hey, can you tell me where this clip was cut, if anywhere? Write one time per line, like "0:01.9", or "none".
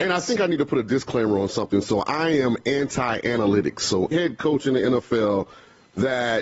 0:04.1